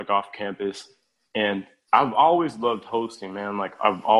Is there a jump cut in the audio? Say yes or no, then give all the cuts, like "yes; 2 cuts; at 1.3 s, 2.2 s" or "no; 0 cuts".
no; 0 cuts